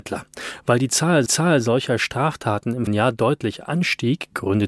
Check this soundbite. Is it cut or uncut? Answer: cut